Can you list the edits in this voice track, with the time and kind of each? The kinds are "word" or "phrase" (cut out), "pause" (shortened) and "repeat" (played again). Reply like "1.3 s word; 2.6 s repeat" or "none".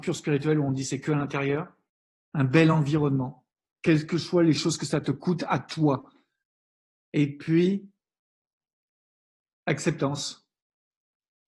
none